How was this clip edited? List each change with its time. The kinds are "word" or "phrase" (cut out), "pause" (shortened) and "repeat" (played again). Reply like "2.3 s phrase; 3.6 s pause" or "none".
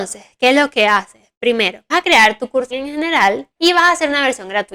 1.9 s word; 2.7 s word; 3.5 s pause